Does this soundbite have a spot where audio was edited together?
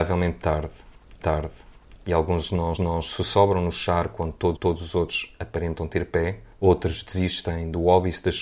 yes; 4 cuts; at 1.2 s, 2.8 s, 4.6 s, 6.5 s

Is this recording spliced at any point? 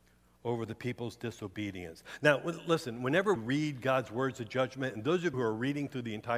yes; 2 cuts; at 3.4 s, 5.3 s

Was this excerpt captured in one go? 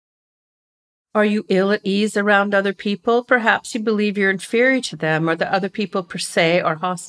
yes; 0 cuts

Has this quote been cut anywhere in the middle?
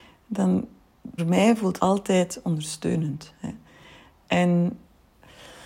yes; 2 cuts; at 1.2 s, 1.8 s

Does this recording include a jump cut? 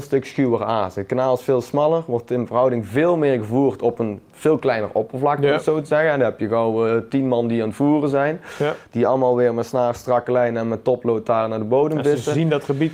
no; 0 cuts

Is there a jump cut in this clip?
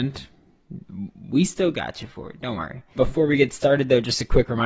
yes; 1 cut; at 3.0 s

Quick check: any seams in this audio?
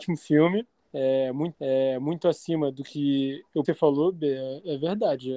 yes; 2 cuts; at 1.5 s, 3.6 s

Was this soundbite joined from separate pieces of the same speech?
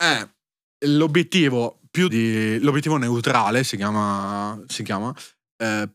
yes; 1 cut; at 2.1 s

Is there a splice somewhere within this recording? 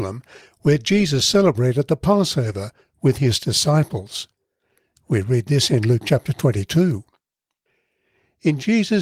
no; 0 cuts

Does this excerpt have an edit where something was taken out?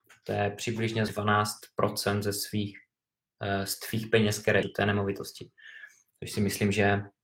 yes; 2 cuts; at 1.1 s, 4.6 s

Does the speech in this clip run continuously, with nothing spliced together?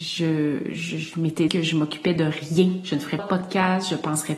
no; 2 cuts; at 1.5 s, 3.2 s

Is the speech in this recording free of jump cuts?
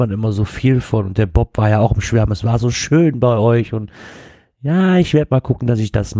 yes; 0 cuts

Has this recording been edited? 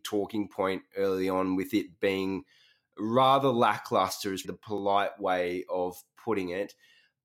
yes; 1 cut; at 4.4 s

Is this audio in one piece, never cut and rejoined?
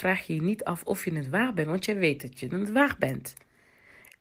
yes; 0 cuts

